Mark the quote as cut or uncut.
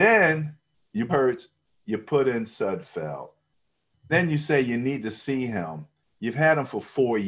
cut